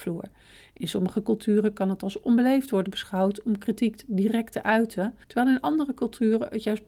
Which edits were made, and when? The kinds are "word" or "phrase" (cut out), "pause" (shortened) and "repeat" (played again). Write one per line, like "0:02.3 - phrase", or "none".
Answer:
0:05.2 - pause